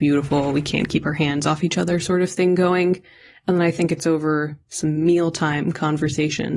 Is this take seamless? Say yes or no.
yes